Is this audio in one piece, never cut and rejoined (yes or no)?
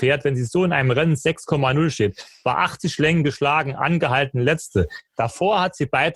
yes